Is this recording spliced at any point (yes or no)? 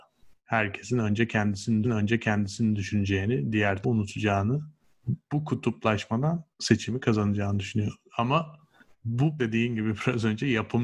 yes